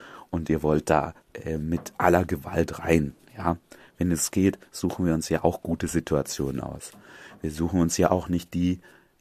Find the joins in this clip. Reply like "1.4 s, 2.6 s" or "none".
1.2 s

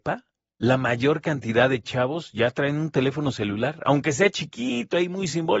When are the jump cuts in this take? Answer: none

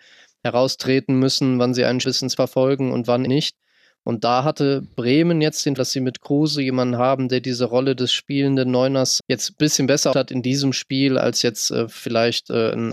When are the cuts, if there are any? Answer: 2.0 s, 2.4 s, 3.3 s, 5.8 s, 9.2 s, 10.1 s

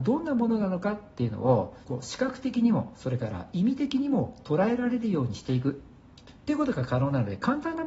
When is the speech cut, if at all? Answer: 1.8 s, 6.4 s

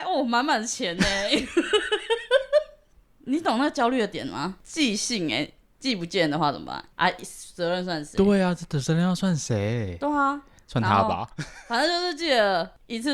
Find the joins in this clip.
none

